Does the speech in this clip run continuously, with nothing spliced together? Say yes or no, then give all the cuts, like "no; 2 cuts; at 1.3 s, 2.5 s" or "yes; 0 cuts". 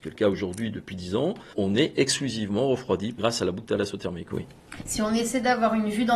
yes; 0 cuts